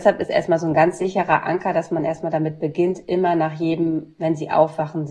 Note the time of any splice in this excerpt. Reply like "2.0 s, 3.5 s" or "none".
none